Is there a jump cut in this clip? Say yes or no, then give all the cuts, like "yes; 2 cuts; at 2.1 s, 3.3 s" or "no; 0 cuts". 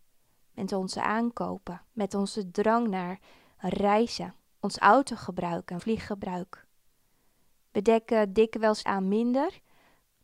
yes; 4 cuts; at 1.9 s, 4.5 s, 5.8 s, 8.8 s